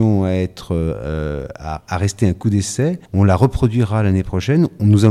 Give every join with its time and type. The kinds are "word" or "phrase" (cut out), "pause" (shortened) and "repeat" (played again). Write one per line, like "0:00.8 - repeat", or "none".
0:03.1 - pause